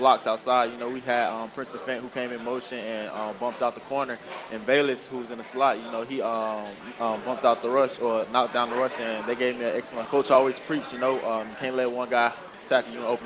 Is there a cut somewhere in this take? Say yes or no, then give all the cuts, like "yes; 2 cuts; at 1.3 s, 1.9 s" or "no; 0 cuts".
yes; 1 cut; at 10.1 s